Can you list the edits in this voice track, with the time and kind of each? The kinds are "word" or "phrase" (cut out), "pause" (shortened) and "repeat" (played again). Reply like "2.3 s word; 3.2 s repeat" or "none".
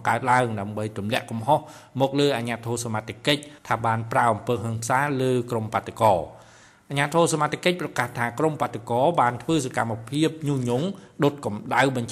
3.6 s pause